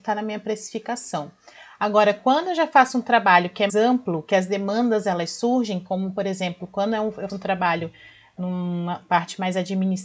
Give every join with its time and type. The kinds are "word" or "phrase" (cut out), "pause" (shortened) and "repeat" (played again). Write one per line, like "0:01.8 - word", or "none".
0:03.7 - word
0:07.3 - word